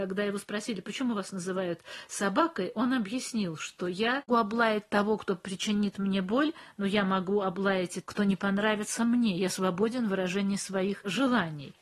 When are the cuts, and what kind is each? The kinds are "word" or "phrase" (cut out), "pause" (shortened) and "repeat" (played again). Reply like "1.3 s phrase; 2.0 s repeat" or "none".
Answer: 4.3 s word; 8.0 s word